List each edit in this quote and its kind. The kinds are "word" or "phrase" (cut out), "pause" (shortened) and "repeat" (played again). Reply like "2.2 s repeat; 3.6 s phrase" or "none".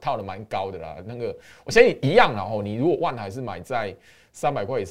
none